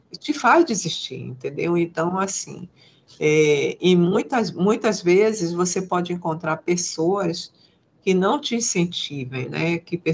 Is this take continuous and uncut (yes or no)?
yes